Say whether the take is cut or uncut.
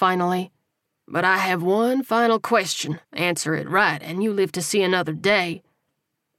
cut